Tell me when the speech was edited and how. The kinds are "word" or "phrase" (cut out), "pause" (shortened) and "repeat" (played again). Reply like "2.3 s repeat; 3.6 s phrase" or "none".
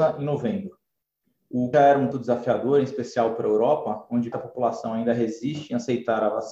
1.7 s phrase; 2.1 s word; 4.3 s word